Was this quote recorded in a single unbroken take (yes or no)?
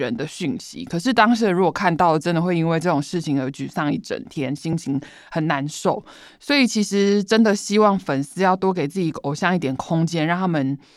yes